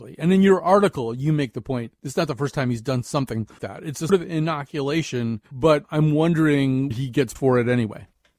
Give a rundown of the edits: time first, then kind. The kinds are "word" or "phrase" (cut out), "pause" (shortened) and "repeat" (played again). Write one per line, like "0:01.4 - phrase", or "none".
0:03.6 - word
0:04.1 - word
0:05.5 - pause
0:06.9 - word
0:07.4 - word